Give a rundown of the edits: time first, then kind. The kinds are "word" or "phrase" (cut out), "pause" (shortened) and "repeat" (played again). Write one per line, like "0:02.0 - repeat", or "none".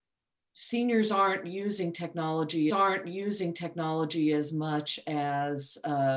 0:02.7 - repeat